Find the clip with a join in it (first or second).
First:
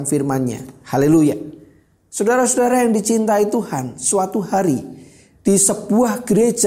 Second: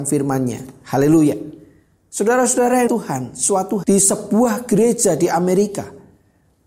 second